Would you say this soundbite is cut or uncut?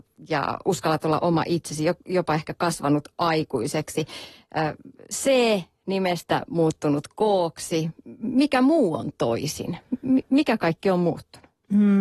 uncut